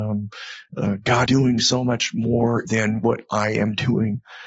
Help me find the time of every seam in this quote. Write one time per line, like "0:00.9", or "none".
0:01.3
0:02.7